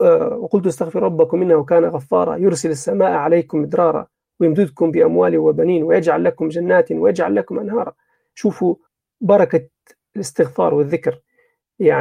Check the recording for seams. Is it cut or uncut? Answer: cut